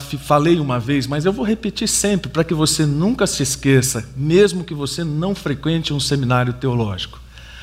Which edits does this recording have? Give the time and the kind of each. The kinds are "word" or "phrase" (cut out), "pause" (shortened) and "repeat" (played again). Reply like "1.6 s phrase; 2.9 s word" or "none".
none